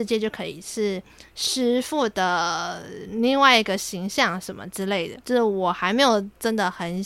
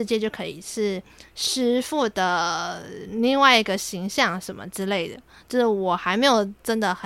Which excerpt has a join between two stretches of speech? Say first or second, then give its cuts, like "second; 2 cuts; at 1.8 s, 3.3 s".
first; 1 cut; at 5.2 s